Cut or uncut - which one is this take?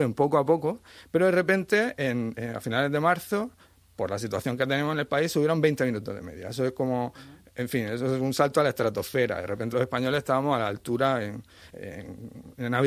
cut